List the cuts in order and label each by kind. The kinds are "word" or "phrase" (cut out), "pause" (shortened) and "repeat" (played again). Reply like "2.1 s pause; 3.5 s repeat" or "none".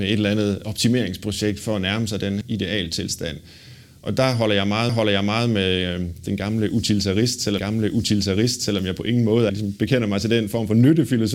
2.4 s word; 4.9 s repeat; 7.6 s repeat; 9.5 s word